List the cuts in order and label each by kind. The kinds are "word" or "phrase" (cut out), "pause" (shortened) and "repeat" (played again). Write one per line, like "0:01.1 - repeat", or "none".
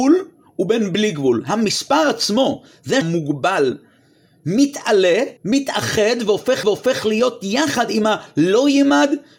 0:03.0 - phrase
0:05.4 - pause
0:06.6 - repeat